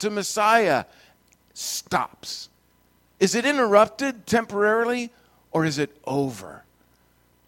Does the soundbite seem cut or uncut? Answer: uncut